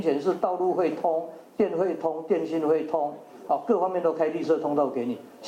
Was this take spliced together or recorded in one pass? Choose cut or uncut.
uncut